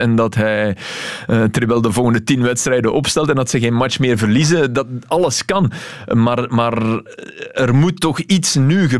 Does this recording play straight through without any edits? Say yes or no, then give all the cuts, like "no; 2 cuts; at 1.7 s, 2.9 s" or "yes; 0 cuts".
yes; 0 cuts